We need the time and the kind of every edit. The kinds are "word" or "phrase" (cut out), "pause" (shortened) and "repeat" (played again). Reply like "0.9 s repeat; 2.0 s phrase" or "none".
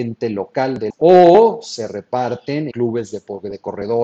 0.9 s word; 2.7 s word

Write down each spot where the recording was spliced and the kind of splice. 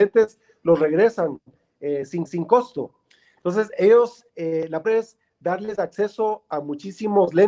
2.3 s repeat; 4.3 s pause; 4.8 s phrase

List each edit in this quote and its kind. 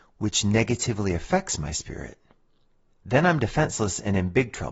none

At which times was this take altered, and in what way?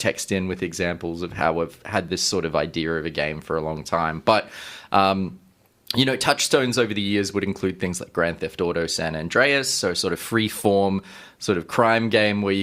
none

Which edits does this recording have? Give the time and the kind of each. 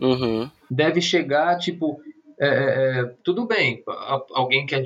none

